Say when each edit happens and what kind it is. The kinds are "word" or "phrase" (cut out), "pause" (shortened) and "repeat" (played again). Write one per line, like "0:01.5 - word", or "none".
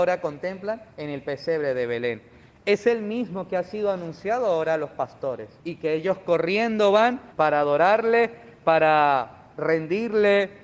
0:00.9 - pause
0:05.6 - pause
0:07.3 - pause